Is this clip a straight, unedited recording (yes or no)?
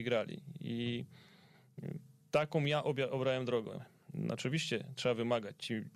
yes